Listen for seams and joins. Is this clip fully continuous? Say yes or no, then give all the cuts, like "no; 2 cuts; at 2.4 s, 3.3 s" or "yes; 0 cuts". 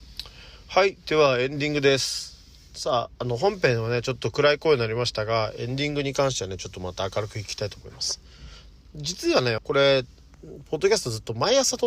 no; 1 cut; at 9.6 s